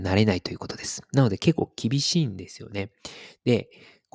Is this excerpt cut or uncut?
uncut